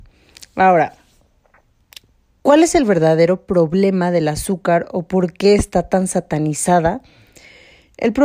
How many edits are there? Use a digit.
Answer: 0